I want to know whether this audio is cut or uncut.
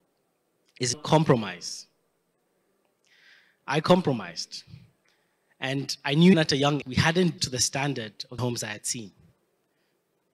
cut